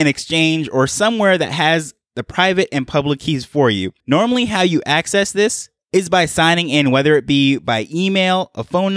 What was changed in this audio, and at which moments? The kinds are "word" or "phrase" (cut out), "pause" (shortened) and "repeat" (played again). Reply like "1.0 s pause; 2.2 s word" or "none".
4.0 s pause